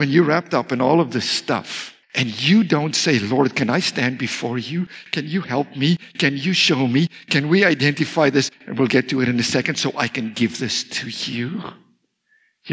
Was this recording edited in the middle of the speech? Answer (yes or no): yes